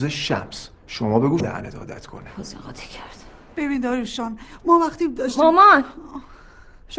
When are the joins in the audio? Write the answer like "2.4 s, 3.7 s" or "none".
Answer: 1.4 s